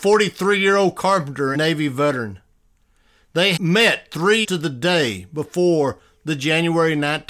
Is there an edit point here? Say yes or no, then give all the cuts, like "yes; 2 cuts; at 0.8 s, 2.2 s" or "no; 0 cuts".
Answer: yes; 3 cuts; at 1.5 s, 3.6 s, 4.4 s